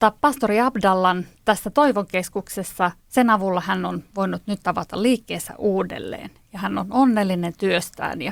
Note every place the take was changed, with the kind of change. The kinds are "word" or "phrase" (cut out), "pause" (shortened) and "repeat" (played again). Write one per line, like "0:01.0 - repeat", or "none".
0:01.3 - pause
0:03.0 - pause